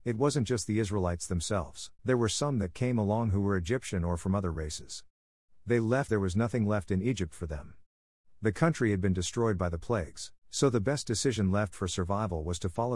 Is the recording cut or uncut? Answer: cut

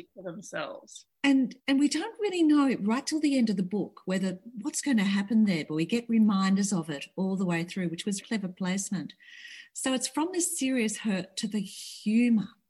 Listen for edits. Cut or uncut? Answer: cut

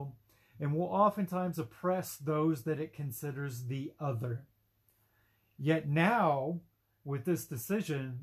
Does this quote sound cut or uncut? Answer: uncut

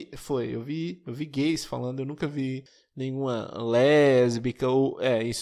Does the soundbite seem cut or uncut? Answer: uncut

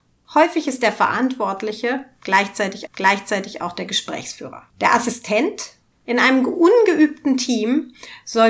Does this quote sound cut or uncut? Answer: cut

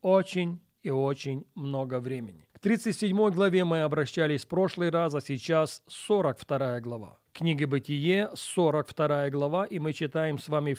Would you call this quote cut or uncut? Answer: cut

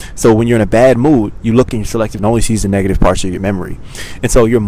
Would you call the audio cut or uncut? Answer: cut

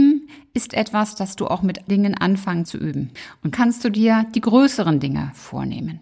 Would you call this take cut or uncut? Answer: cut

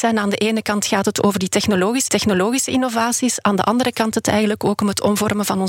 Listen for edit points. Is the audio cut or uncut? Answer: cut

